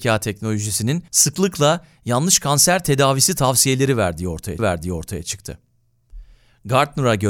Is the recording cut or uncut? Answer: cut